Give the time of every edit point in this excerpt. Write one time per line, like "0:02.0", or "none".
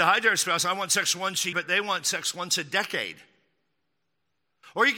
0:01.5